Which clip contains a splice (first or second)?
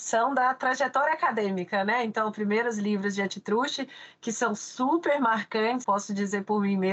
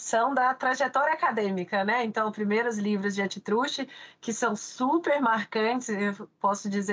first